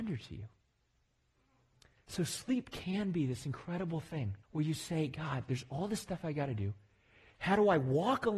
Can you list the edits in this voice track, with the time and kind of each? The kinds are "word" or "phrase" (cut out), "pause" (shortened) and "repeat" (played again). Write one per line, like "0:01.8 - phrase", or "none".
0:04.4 - pause